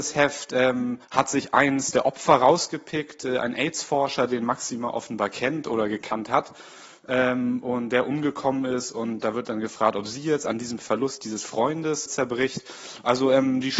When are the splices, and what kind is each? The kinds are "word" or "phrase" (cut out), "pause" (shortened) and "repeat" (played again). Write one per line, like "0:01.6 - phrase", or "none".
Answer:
0:01.0 - pause
0:12.1 - word